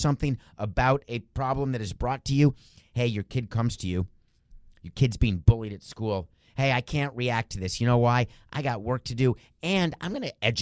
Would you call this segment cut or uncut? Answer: uncut